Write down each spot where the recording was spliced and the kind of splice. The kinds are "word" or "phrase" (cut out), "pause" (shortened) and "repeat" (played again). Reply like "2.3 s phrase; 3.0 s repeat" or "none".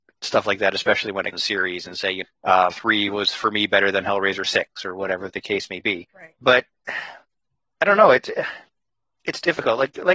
1.3 s phrase; 2.2 s word; 2.7 s word; 5.3 s word; 6.1 s pause